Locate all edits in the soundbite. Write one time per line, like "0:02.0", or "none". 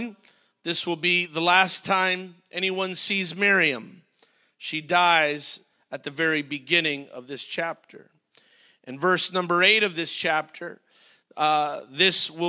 none

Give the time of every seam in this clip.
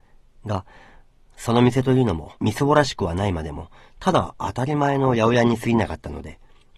0:02.4

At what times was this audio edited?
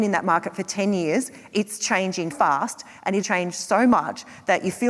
0:02.3
0:03.2

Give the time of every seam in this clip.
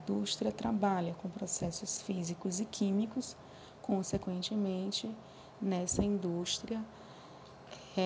none

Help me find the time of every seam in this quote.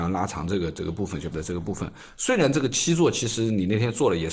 0:01.3

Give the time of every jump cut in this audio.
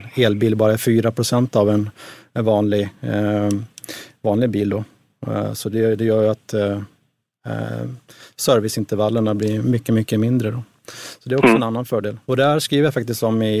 0:12.2

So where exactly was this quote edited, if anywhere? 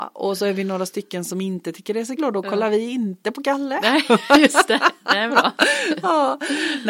0:02.2
0:05.3

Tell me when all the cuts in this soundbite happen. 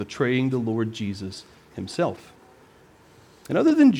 none

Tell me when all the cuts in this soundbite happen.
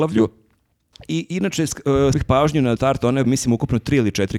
0:02.1
0:02.8
0:03.2

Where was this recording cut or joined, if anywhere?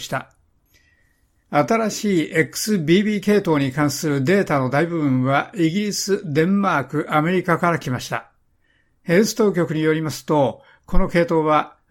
none

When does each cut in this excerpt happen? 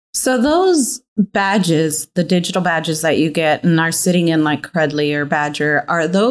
0:01.1

